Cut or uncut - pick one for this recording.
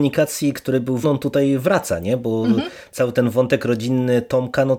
cut